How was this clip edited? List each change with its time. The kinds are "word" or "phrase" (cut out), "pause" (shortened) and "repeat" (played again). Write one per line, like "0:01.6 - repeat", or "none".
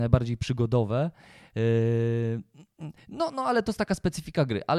none